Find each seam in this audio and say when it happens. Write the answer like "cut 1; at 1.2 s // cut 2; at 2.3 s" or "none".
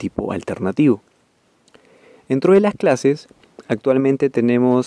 none